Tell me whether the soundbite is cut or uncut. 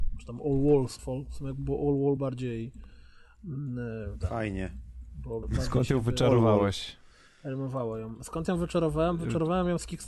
cut